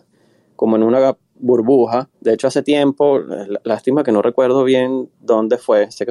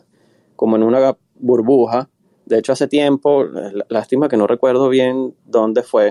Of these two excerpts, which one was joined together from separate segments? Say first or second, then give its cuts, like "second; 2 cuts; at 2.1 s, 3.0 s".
first; 1 cut; at 2.1 s